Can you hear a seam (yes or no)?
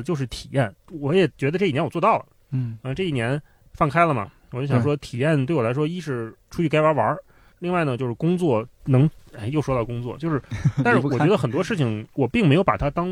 no